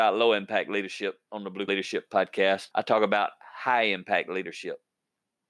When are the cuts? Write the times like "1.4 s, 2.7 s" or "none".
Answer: 1.7 s, 2.7 s

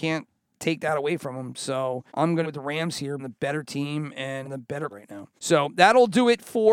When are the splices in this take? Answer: 2.1 s, 2.4 s, 3.2 s, 4.4 s, 4.9 s, 5.4 s

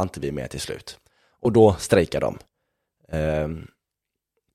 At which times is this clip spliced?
none

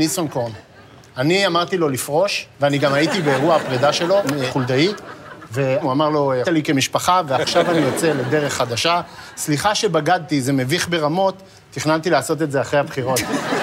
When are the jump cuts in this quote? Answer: 2.5 s, 6.4 s

